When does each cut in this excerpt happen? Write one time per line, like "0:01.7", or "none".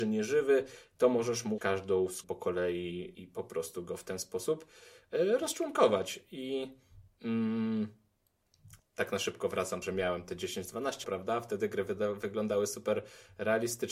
0:01.6
0:02.2
0:03.1
0:08.8
0:09.8
0:11.0